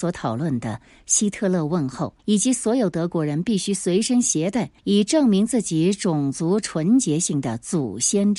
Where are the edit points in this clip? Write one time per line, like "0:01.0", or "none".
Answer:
0:02.2
0:04.8